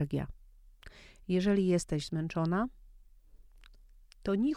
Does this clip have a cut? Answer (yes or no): no